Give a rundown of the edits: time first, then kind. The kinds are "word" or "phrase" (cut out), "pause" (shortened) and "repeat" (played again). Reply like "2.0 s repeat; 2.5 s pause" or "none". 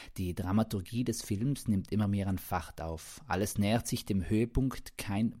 none